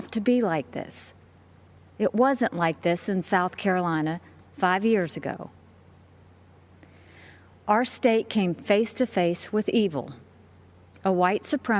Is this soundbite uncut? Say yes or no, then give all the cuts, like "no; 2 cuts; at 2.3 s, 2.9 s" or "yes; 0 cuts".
yes; 0 cuts